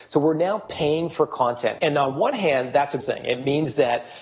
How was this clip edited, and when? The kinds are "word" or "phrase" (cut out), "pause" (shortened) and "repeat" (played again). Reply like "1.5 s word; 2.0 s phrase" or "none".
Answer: 1.8 s word; 3.0 s word